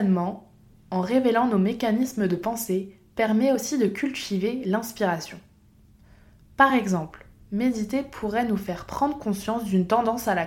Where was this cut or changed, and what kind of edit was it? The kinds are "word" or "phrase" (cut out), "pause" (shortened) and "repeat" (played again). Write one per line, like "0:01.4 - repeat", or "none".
none